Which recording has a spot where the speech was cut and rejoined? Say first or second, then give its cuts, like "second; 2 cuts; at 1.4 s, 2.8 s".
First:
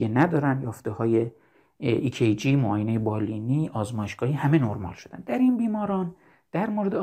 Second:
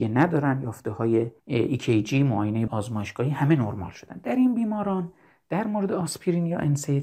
second; 2 cuts; at 1.4 s, 2.7 s